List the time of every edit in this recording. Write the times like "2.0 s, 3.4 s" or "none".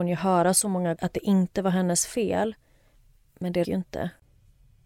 1.0 s, 3.6 s